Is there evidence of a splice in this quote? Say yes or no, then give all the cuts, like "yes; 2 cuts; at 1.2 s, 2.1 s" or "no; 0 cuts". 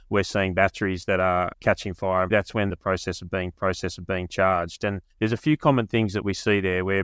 yes; 5 cuts; at 1.5 s, 2.3 s, 2.7 s, 3.5 s, 5.1 s